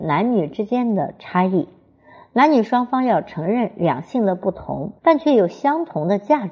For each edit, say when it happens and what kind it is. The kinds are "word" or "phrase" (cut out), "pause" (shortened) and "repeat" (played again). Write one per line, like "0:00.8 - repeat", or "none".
0:05.0 - pause